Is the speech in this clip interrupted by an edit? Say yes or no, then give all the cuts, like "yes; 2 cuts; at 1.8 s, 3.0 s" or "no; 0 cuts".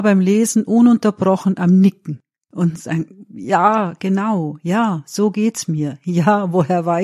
no; 0 cuts